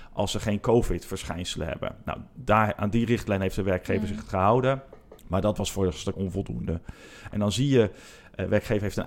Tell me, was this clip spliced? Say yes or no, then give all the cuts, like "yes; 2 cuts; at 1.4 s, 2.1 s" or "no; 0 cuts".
yes; 2 cuts; at 5.2 s, 6.1 s